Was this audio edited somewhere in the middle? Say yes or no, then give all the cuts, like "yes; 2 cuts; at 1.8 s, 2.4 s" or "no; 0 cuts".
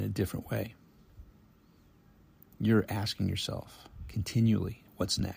no; 0 cuts